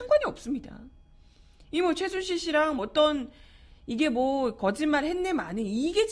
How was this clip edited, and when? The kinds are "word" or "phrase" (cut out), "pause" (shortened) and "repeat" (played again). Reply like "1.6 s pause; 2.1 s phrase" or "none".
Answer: 2.8 s word